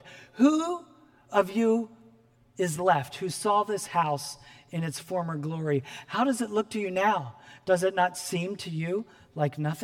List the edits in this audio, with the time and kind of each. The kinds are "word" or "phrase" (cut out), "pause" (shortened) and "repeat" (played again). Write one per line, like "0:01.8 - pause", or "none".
none